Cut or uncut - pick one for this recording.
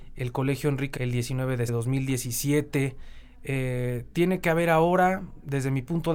cut